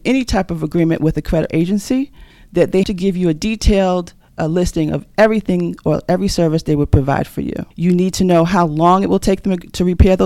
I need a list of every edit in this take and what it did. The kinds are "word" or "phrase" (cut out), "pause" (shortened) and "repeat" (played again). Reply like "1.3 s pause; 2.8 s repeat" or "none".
1.5 s word; 2.3 s pause; 2.8 s word; 7.7 s pause